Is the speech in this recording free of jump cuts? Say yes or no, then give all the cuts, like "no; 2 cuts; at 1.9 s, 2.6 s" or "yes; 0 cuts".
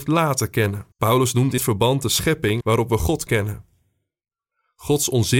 no; 4 cuts; at 0.9 s, 1.6 s, 2.6 s, 3.3 s